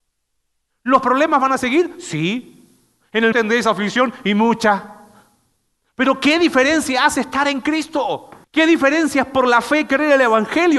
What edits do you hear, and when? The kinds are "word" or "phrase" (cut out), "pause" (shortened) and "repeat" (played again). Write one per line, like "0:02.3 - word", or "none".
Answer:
0:03.3 - word
0:08.4 - pause